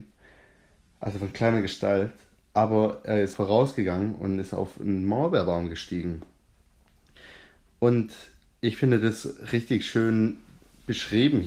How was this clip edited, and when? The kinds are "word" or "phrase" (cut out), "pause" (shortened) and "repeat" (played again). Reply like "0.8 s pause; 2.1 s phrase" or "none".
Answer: 3.3 s word